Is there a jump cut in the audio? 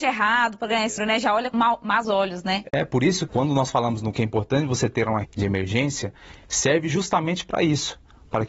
yes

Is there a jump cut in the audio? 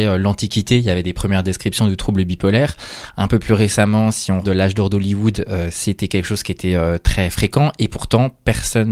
yes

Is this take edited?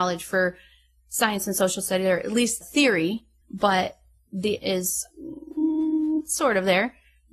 yes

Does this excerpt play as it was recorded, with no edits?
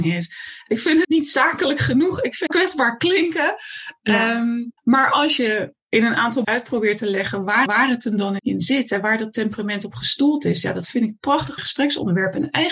no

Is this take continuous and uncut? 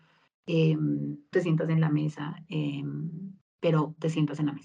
no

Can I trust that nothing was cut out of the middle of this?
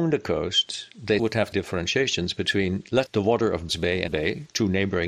no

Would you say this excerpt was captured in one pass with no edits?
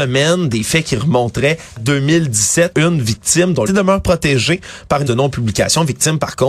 no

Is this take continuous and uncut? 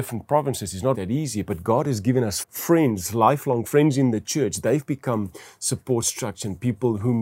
no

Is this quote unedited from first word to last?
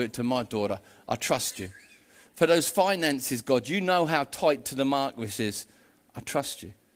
yes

